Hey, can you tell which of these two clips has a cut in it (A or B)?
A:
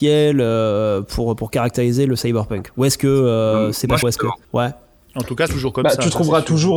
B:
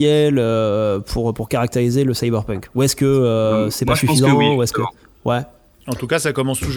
A